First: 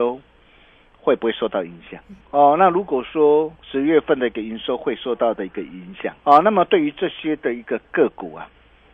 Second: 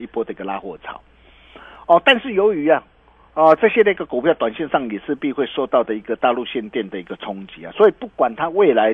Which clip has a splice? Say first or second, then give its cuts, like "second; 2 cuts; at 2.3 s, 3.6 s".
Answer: first; 3 cuts; at 2.2 s, 3.6 s, 6.2 s